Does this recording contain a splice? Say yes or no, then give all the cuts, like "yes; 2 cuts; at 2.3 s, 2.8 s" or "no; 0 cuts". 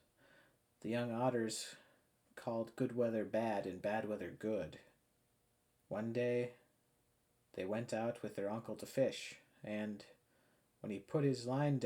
yes; 1 cut; at 5.1 s